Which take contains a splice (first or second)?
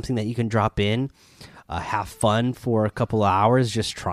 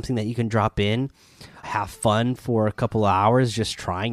second